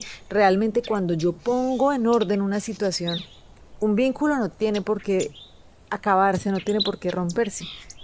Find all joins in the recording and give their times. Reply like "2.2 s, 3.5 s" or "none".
none